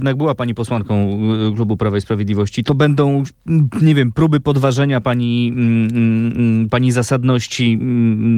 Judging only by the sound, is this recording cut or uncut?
cut